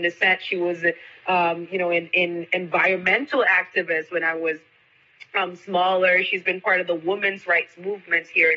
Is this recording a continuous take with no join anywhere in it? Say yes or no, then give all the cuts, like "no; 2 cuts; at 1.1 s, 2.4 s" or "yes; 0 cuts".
yes; 0 cuts